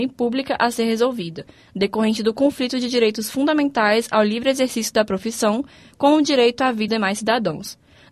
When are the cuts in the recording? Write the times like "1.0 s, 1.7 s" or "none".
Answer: 6.9 s